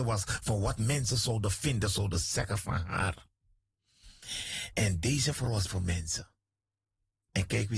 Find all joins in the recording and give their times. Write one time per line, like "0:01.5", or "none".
0:05.7